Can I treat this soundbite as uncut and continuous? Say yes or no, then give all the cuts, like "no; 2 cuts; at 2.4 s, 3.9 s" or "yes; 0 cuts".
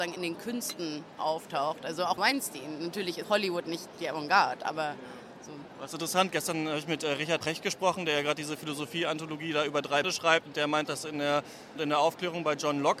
no; 6 cuts; at 2.2 s, 3.2 s, 7.4 s, 10.0 s, 10.8 s, 11.8 s